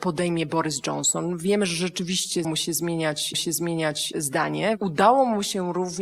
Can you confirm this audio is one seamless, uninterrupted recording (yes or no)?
no